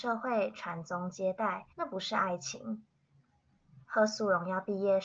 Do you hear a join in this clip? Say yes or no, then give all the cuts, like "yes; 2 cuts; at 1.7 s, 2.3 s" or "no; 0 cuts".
yes; 2 cuts; at 1.7 s, 3.8 s